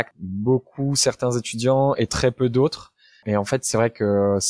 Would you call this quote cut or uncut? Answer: uncut